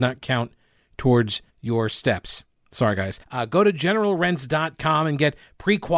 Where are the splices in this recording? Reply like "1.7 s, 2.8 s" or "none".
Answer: 1.5 s, 3.2 s